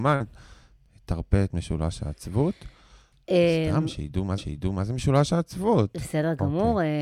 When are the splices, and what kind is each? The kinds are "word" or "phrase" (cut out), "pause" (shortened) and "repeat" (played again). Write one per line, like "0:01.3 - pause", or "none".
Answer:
0:04.4 - repeat